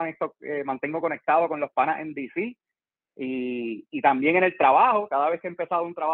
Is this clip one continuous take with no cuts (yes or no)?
yes